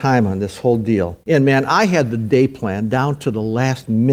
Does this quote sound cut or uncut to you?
cut